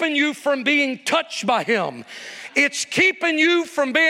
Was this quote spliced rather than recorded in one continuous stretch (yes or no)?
no